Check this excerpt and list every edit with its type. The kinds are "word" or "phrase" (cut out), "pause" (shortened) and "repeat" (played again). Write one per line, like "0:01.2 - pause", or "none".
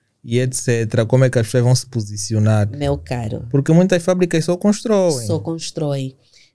none